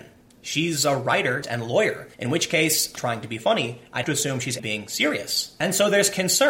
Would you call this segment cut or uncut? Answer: cut